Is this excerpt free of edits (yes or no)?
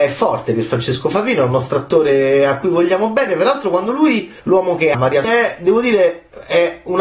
no